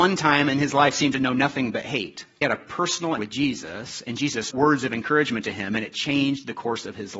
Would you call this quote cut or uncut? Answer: cut